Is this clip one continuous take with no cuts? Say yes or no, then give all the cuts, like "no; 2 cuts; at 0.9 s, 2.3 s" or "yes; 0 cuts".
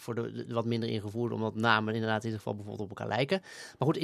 yes; 0 cuts